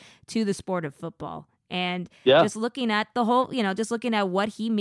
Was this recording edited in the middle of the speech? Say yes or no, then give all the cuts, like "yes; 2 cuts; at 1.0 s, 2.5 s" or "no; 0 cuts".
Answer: no; 0 cuts